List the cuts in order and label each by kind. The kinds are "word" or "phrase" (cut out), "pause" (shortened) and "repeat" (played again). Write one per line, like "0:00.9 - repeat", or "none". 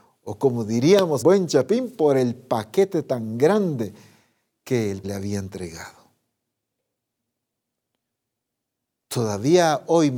0:01.2 - word
0:05.0 - word